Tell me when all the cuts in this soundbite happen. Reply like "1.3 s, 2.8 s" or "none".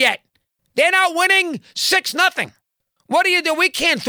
none

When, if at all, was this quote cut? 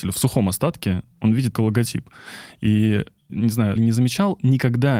1.5 s, 3.3 s, 3.8 s

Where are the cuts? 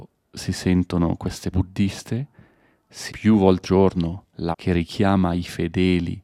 1.5 s, 3.1 s, 3.6 s, 4.5 s

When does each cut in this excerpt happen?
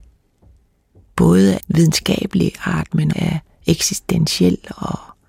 1.2 s, 1.6 s, 3.1 s

